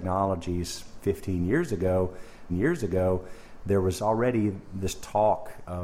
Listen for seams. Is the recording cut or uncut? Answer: cut